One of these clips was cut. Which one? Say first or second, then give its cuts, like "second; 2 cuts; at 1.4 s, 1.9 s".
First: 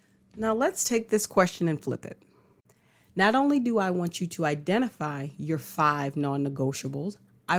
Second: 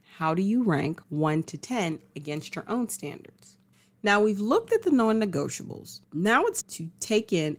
second; 4 cuts; at 1.0 s, 3.7 s, 6.0 s, 6.6 s